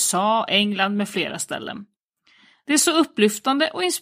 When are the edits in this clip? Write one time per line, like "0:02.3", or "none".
none